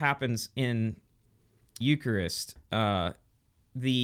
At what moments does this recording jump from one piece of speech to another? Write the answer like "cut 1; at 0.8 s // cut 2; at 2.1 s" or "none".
cut 1; at 1.8 s

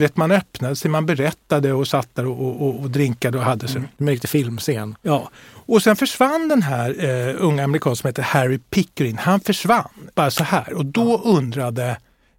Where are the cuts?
cut 1; at 3.9 s

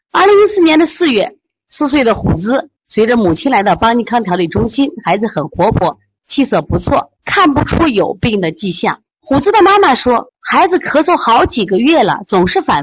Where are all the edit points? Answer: cut 1; at 2.8 s // cut 2; at 7.2 s // cut 3; at 9.1 s // cut 4; at 10.3 s

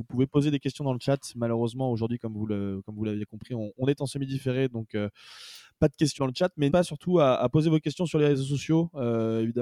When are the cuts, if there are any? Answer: cut 1; at 6.2 s // cut 2; at 6.7 s

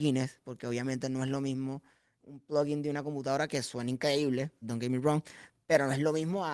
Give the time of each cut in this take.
cut 1; at 4.6 s

